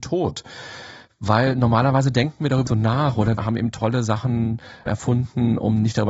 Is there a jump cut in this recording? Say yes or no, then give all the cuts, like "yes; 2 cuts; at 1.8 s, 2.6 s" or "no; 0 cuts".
yes; 3 cuts; at 2.7 s, 3.4 s, 4.9 s